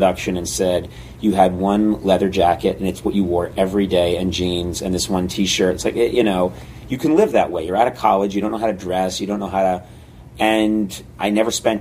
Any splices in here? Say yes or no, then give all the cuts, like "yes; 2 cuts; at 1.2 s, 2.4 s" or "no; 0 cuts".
no; 0 cuts